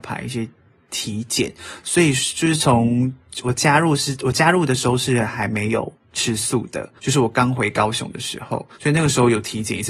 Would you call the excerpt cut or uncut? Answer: cut